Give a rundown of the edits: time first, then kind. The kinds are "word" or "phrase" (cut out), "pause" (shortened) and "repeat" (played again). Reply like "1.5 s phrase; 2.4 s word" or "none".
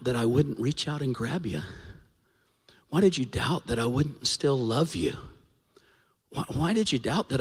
none